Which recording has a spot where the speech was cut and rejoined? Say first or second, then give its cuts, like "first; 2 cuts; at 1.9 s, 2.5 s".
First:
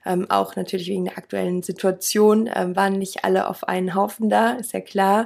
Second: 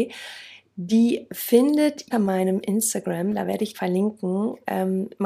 second; 2 cuts; at 2.1 s, 3.7 s